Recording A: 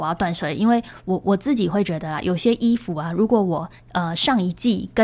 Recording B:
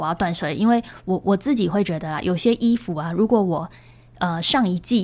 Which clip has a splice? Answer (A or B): A